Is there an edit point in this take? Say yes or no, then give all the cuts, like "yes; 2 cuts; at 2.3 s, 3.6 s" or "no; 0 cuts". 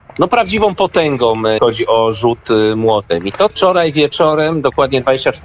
yes; 2 cuts; at 1.6 s, 3.5 s